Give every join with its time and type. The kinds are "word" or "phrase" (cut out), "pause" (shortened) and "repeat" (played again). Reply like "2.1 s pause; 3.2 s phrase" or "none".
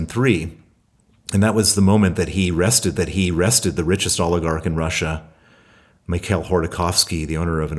3.0 s repeat